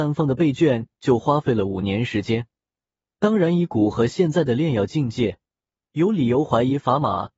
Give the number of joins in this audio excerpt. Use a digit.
0